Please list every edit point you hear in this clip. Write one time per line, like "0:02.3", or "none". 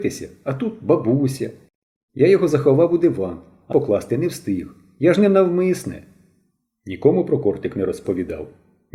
0:03.7